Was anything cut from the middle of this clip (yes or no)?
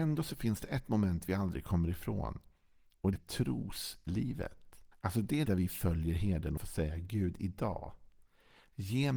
yes